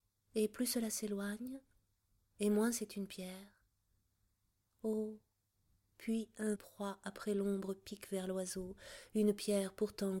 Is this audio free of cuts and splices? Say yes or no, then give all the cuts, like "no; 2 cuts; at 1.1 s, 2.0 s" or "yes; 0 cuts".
no; 1 cut; at 6.5 s